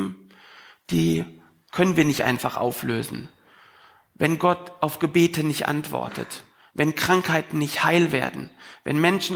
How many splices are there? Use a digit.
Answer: 0